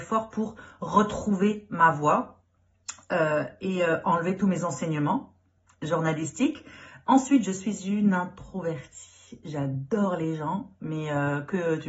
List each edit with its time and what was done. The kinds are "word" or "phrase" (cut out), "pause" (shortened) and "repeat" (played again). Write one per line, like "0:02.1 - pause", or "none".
none